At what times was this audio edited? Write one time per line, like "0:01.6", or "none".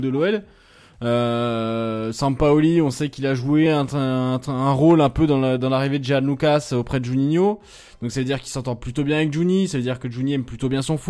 none